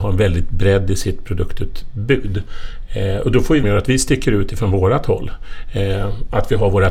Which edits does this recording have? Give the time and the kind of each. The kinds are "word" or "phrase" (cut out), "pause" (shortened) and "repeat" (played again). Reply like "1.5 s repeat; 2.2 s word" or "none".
3.6 s phrase